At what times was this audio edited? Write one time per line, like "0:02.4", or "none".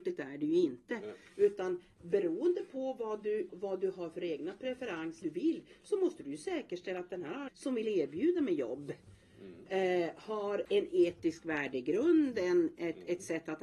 0:03.5
0:05.2
0:07.5
0:10.6

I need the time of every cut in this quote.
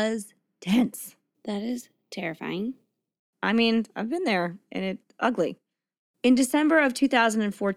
0:05.0

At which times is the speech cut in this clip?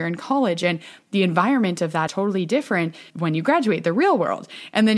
0:02.1
0:03.1

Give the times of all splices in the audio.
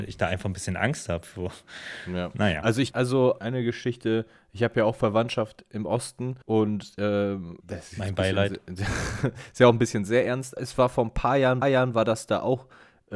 0:02.9
0:03.4
0:06.4
0:07.6
0:10.6
0:11.6

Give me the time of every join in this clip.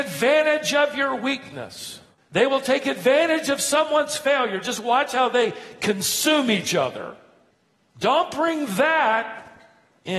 none

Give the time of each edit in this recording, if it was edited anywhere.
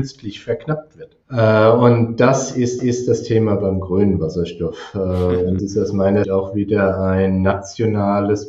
0:01.2
0:02.8
0:05.6
0:06.2

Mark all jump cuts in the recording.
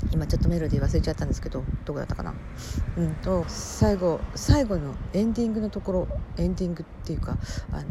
0:03.4

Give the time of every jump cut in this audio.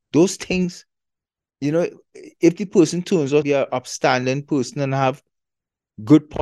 0:03.4

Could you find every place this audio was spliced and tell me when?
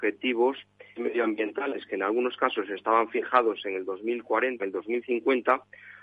0:00.9
0:04.6

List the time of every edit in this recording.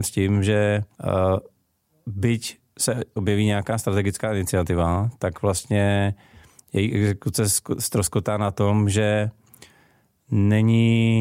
0:00.9
0:03.2

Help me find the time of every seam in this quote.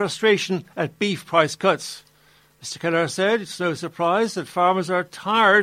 none

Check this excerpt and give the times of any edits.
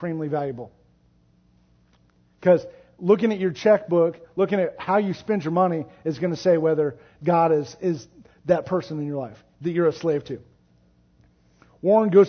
none

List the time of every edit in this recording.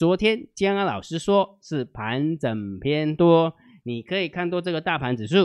none

